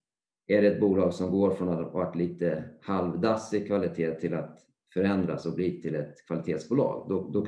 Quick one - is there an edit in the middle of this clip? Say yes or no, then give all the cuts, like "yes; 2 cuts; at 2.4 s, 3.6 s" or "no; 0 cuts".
no; 0 cuts